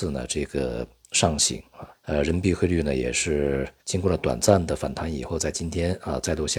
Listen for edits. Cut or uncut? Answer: cut